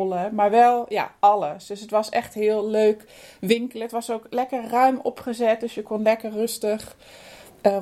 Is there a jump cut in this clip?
no; 0 cuts

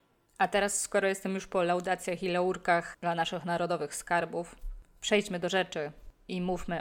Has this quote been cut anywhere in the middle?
no; 0 cuts

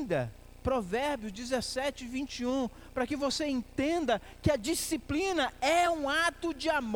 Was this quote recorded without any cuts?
yes; 0 cuts

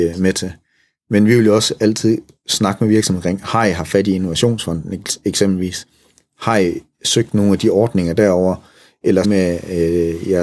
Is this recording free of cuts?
no; 1 cut; at 9.2 s

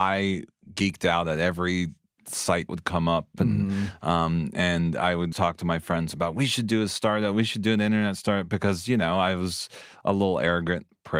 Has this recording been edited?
yes; 2 cuts; at 2.7 s, 5.3 s

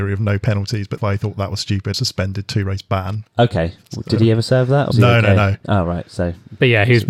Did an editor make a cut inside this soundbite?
yes; 4 cuts; at 1.0 s, 1.9 s, 3.3 s, 4.9 s

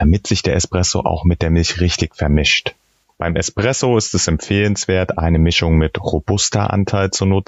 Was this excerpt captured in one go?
yes; 0 cuts

